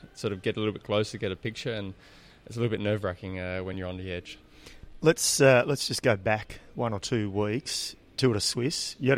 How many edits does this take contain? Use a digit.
0